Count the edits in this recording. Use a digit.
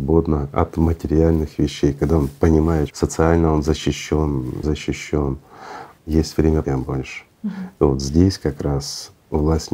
4